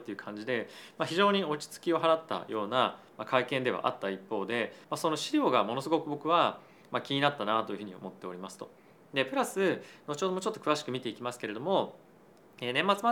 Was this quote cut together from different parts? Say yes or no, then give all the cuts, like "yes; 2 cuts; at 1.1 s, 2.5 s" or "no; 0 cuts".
yes; 1 cut; at 4.8 s